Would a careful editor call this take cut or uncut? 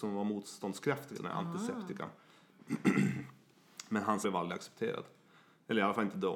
cut